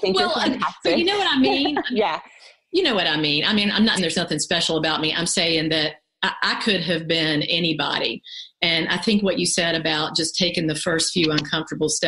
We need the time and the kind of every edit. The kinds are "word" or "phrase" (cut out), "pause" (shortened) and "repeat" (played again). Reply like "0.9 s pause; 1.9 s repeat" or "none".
4.0 s word